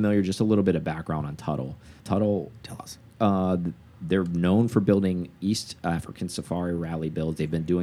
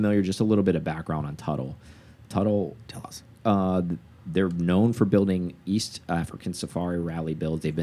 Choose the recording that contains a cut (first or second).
first